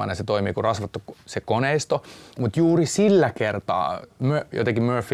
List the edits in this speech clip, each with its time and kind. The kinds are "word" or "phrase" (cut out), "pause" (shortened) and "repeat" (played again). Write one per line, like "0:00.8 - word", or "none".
none